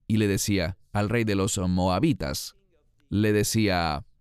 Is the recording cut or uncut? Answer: uncut